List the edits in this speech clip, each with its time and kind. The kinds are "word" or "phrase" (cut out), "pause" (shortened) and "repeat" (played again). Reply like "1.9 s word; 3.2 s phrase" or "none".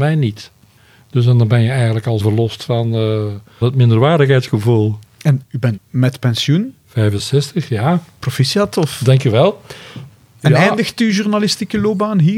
2.2 s word; 3.6 s word; 5.4 s word; 5.8 s word